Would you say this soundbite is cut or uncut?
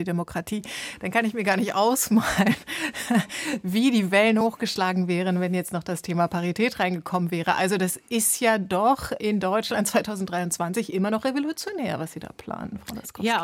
uncut